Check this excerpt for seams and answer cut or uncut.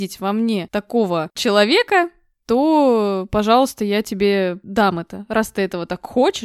uncut